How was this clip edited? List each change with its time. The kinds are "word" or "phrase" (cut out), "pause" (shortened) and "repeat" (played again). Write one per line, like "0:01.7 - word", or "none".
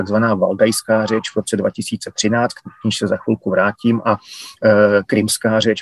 none